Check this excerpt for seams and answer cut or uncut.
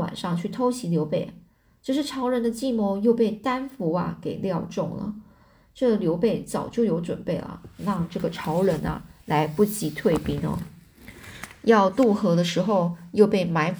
uncut